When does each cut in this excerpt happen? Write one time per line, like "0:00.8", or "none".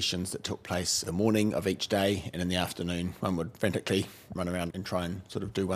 0:01.0
0:04.4
0:04.7